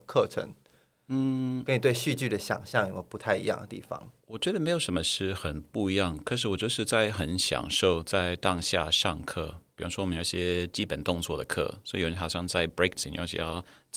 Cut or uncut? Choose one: cut